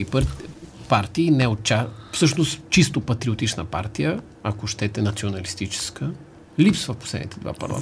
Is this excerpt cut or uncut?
uncut